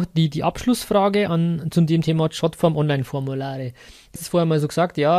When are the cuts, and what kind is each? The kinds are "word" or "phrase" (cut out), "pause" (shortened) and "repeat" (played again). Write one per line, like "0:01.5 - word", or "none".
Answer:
0:01.3 - word
0:04.2 - word